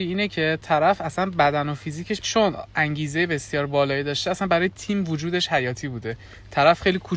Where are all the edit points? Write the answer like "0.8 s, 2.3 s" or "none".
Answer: 2.2 s